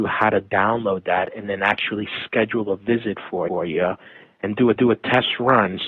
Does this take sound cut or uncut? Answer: cut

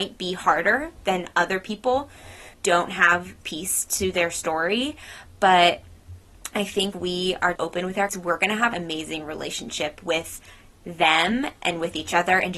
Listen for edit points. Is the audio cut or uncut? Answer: cut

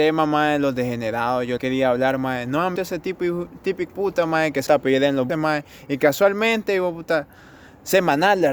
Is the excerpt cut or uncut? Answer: cut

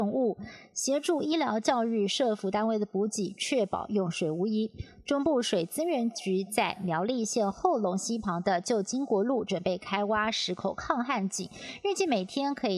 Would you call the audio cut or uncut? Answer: uncut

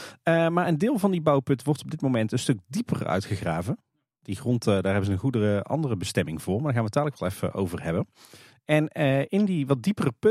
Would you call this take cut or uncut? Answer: uncut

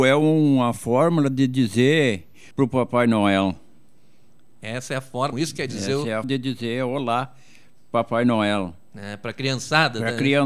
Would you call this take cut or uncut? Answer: cut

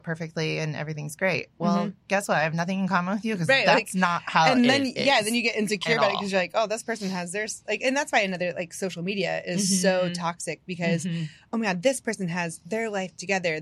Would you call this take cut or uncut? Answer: uncut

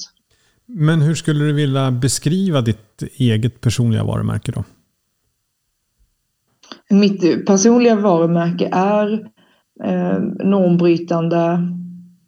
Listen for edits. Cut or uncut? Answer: uncut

